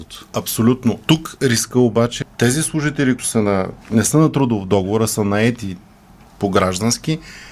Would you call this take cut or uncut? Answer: cut